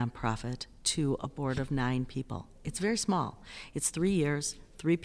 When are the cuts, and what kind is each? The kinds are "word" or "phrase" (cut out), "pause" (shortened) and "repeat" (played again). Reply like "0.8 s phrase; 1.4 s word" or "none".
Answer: none